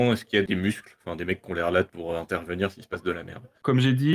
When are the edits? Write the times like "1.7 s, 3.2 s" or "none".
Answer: none